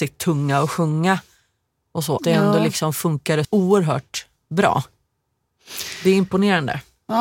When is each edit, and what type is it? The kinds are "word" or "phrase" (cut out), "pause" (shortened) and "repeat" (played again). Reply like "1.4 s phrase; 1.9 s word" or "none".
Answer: 2.2 s word; 3.4 s word